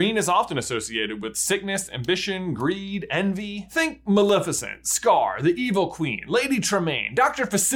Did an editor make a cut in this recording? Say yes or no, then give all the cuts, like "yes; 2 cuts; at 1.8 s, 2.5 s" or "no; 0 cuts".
no; 0 cuts